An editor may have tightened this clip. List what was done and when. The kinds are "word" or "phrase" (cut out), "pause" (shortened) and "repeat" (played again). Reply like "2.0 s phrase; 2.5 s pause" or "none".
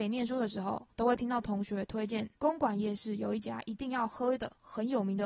0.9 s pause; 2.4 s pause